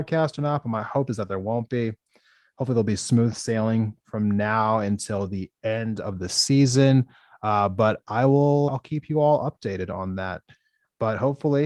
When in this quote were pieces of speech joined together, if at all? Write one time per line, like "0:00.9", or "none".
0:08.7

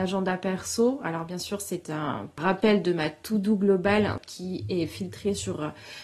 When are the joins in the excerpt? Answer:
none

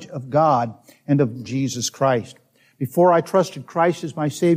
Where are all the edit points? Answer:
0:01.5

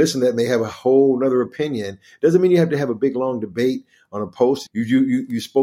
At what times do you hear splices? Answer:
0:04.7

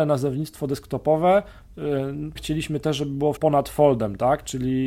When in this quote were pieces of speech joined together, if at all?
0:02.4
0:03.4

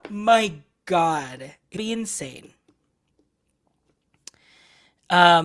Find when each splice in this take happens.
0:01.8

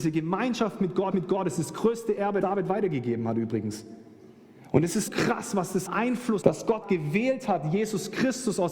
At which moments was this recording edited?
0:01.1
0:02.4
0:05.1
0:05.9
0:06.4
0:06.8

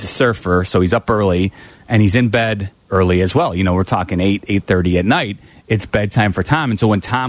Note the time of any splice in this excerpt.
none

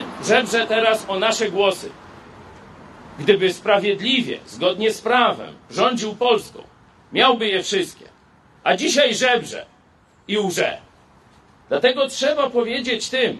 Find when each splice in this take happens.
none

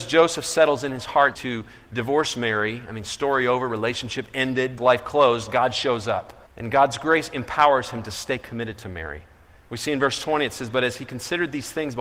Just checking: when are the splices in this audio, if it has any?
0:01.3
0:04.8
0:06.5

